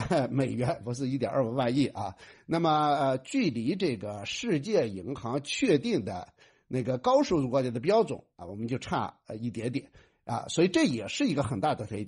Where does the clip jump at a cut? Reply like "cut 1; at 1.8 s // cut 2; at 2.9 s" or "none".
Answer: none

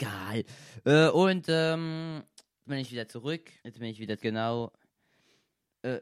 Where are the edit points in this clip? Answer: cut 1; at 2.6 s // cut 2; at 3.6 s // cut 3; at 4.2 s

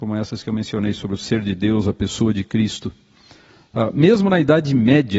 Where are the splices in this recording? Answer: none

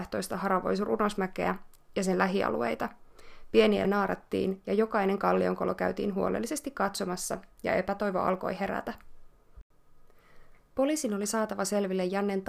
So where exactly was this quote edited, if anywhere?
cut 1; at 3.8 s

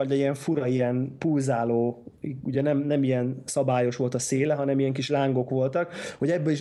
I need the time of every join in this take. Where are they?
none

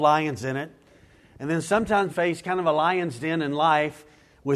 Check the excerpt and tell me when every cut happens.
cut 1; at 2.1 s

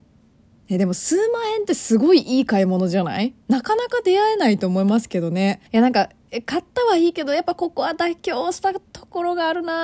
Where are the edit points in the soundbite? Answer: cut 1; at 3.4 s // cut 2; at 5.7 s

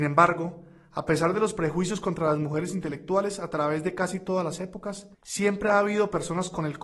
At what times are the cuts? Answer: cut 1; at 5.1 s

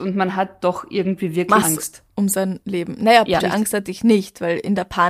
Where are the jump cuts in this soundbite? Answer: cut 1; at 1.6 s // cut 2; at 3.4 s

